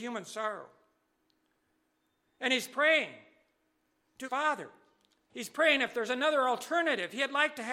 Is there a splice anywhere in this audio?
yes; 1 cut; at 4.2 s

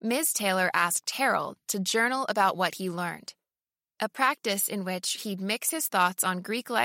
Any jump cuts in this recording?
no; 0 cuts

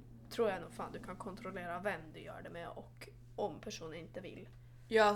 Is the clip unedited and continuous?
yes; 0 cuts

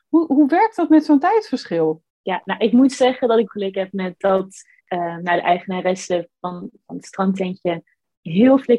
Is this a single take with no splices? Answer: no; 3 cuts; at 2.1 s, 3.5 s, 4.8 s

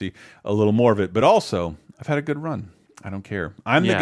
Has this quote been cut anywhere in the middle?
no; 0 cuts

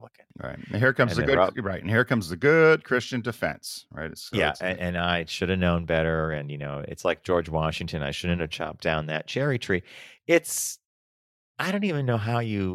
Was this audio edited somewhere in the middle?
no; 0 cuts

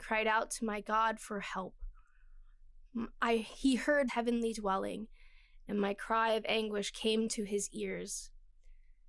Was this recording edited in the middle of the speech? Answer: yes; 1 cut; at 4.1 s

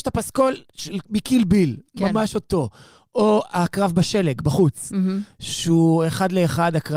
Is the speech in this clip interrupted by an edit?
no; 0 cuts

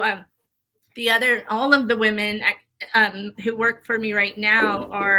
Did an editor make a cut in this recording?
yes; 1 cut; at 3.3 s

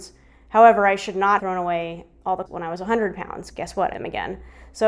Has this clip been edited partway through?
yes; 4 cuts; at 1.4 s, 2.5 s, 3.5 s, 3.9 s

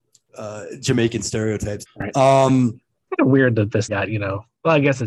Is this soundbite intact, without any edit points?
no; 3 cuts; at 1.9 s, 3.1 s, 3.9 s

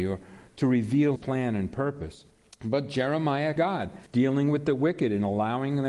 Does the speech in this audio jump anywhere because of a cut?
yes; 4 cuts; at 1.2 s, 2.3 s, 3.6 s, 4.1 s

